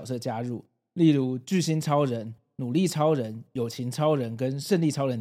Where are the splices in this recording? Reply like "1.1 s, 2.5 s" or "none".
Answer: none